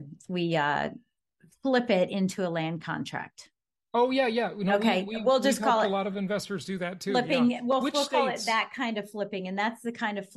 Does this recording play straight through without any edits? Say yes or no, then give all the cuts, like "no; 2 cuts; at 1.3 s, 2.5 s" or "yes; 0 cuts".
yes; 0 cuts